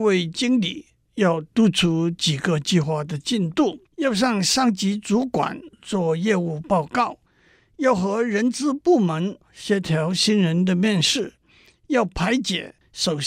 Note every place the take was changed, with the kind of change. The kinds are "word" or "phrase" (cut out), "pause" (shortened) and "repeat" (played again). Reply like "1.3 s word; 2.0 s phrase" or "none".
3.9 s pause